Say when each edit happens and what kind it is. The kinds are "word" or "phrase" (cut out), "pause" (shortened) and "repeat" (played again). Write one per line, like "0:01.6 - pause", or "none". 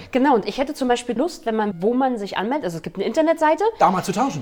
0:01.2 - word
0:01.7 - word